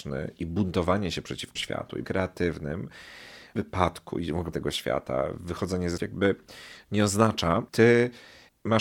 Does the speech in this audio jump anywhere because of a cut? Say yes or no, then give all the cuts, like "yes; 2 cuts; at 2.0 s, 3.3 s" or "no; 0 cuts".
yes; 6 cuts; at 1.6 s, 2.0 s, 3.6 s, 4.5 s, 6.0 s, 7.7 s